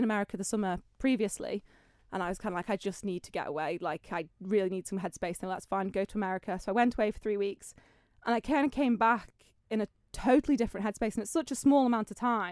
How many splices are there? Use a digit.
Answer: 0